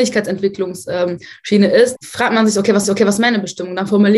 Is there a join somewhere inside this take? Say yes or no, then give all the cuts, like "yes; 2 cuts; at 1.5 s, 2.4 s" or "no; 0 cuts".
yes; 2 cuts; at 2.0 s, 2.8 s